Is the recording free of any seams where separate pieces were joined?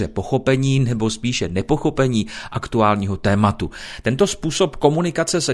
yes; 0 cuts

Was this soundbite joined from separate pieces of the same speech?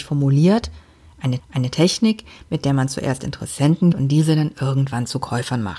yes; 2 cuts; at 1.4 s, 3.9 s

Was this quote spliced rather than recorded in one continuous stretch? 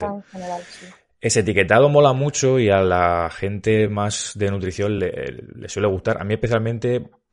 no; 0 cuts

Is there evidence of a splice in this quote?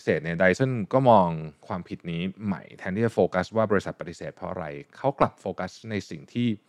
no; 0 cuts

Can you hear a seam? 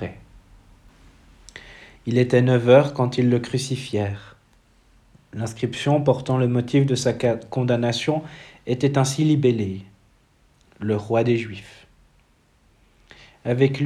no; 0 cuts

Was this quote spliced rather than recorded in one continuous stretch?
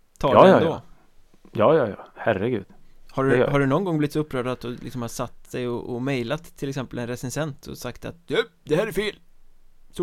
no; 0 cuts

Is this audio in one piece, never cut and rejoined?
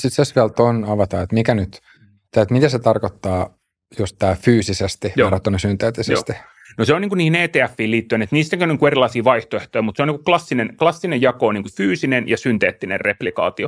yes; 0 cuts

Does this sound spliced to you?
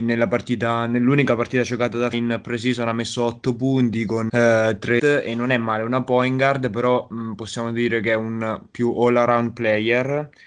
yes; 3 cuts; at 2.1 s, 4.3 s, 5.0 s

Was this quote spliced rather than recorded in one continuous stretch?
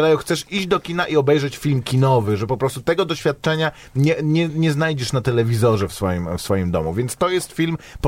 no; 0 cuts

